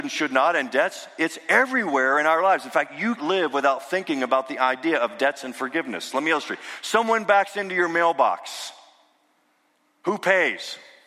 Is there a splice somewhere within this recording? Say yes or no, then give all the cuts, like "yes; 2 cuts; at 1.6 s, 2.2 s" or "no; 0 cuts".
yes; 1 cut; at 3.2 s